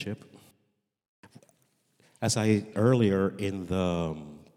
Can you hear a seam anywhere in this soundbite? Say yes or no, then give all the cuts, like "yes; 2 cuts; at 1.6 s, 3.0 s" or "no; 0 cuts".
yes; 1 cut; at 2.7 s